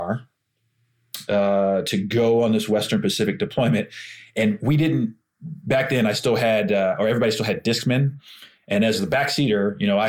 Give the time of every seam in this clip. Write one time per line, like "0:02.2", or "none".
none